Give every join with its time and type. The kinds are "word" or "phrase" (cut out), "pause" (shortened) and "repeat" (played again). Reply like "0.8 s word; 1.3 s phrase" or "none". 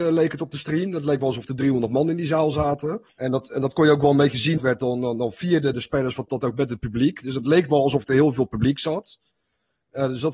3.1 s pause; 4.6 s phrase; 5.7 s word; 6.3 s word